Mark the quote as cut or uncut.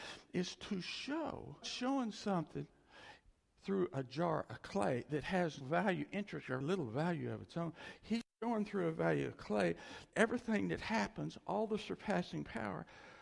cut